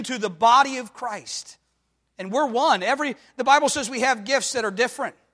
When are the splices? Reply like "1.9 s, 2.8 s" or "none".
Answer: none